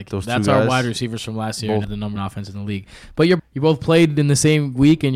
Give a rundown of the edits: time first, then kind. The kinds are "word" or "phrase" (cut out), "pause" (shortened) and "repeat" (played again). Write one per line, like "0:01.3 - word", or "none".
0:01.8 - word
0:02.2 - word
0:03.4 - word